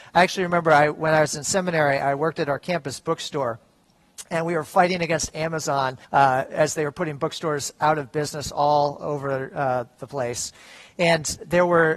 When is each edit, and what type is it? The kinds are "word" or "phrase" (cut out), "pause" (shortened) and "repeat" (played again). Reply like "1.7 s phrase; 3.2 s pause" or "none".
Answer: 6.0 s pause